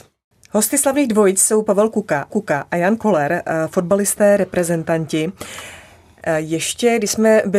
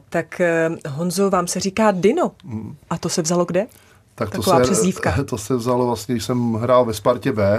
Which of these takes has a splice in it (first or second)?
first